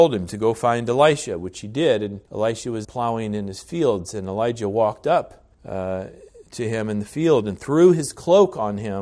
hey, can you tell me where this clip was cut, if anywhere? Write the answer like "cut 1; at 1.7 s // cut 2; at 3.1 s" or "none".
cut 1; at 2.3 s // cut 2; at 2.8 s // cut 3; at 5.5 s